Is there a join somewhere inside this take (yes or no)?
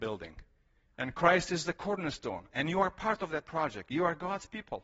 no